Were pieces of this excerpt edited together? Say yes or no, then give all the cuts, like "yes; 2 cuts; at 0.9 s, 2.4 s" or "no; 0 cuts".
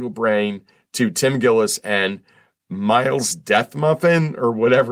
no; 0 cuts